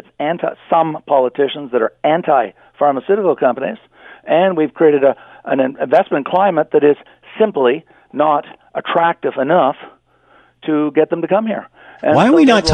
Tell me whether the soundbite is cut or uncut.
uncut